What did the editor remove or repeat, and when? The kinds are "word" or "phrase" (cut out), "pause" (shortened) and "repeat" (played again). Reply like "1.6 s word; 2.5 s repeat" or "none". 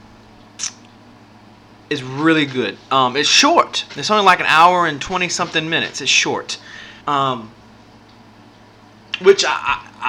7.0 s pause